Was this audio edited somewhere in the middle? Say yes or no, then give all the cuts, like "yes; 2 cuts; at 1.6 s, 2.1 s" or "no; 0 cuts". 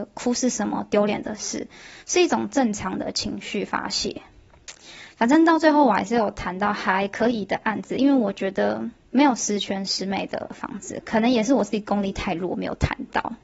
yes; 2 cuts; at 2.0 s, 9.0 s